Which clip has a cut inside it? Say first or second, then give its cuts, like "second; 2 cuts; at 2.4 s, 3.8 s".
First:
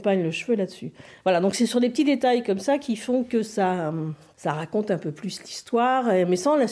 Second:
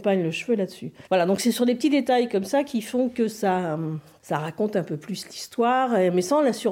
second; 1 cut; at 1.1 s